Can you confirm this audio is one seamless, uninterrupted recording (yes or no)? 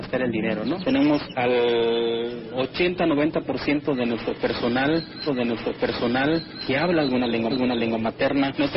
no